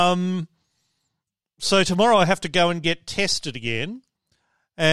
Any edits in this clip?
no; 0 cuts

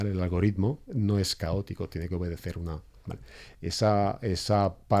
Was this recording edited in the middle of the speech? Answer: no; 0 cuts

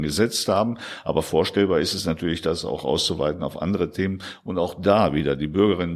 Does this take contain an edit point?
no; 0 cuts

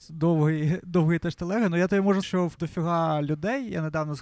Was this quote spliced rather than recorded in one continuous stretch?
yes; 2 cuts; at 2.2 s, 2.6 s

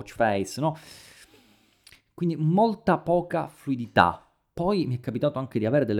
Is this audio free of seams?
yes; 0 cuts

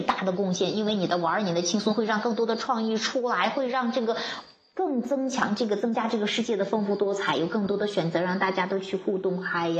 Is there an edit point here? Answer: no; 0 cuts

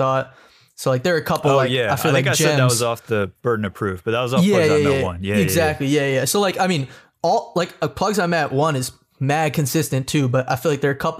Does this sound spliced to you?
no; 0 cuts

